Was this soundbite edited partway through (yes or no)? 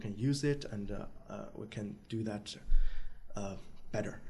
no